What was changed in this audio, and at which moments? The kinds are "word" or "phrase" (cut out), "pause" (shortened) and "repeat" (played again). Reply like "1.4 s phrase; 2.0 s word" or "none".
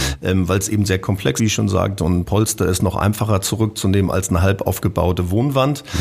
1.4 s word